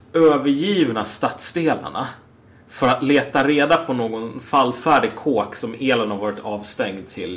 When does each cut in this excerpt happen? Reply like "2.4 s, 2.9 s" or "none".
none